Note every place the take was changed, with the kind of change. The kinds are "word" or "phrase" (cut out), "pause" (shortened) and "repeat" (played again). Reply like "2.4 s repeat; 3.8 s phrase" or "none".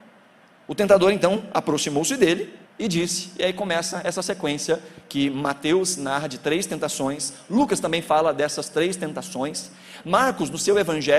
2.6 s pause

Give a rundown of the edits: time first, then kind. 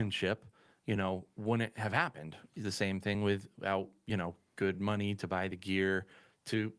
none

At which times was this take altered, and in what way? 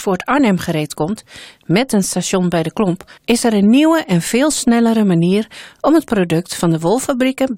3.2 s pause

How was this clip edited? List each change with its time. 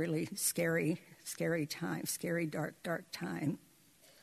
2.8 s pause

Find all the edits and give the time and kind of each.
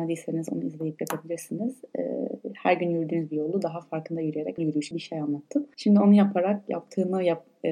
4.6 s word; 4.9 s word

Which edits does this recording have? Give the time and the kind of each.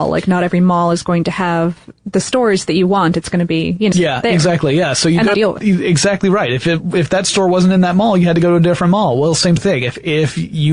3.9 s phrase; 5.3 s phrase; 9.6 s word

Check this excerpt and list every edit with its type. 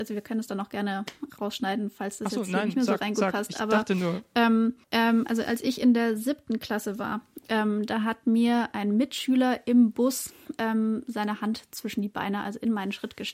4.8 s pause

